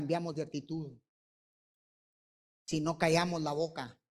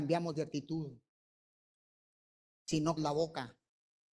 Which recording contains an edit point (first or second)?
second